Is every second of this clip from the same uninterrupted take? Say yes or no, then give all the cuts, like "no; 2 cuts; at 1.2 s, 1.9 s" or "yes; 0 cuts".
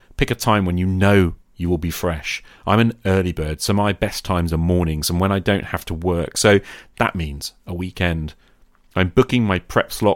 yes; 0 cuts